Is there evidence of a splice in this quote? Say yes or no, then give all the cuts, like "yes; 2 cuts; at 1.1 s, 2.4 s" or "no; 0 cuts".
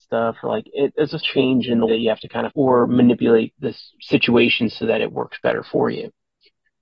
yes; 4 cuts; at 1.2 s, 1.9 s, 2.5 s, 3.5 s